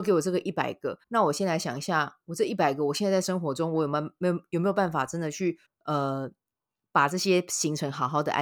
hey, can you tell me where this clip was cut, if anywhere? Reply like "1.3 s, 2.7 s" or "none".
1.0 s, 5.6 s